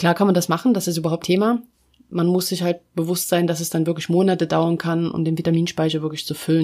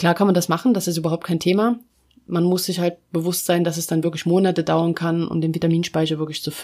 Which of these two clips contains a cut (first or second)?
first